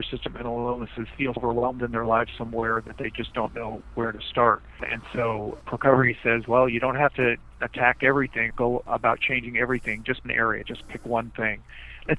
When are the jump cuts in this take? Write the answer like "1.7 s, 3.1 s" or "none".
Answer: 1.4 s, 5.6 s, 8.5 s, 10.2 s